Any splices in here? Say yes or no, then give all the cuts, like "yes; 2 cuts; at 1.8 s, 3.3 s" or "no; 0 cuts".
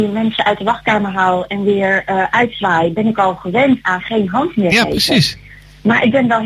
no; 0 cuts